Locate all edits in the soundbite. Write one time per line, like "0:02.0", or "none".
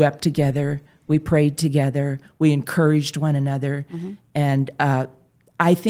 none